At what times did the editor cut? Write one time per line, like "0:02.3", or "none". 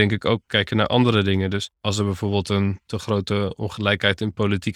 0:01.7